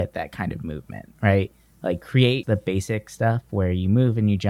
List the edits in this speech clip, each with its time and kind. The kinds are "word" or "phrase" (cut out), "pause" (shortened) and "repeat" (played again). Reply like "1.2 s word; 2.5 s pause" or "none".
2.4 s word